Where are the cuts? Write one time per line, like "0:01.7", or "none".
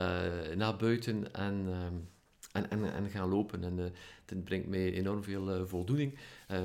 none